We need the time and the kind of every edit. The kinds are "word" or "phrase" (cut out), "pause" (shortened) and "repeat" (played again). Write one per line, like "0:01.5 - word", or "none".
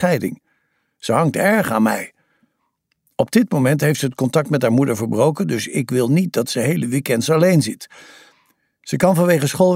none